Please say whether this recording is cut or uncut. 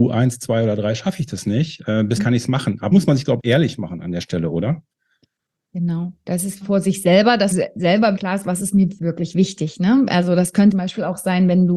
cut